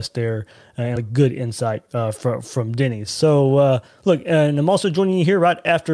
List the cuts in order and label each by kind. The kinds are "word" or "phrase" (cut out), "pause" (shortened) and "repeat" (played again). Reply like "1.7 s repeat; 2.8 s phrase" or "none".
1.0 s word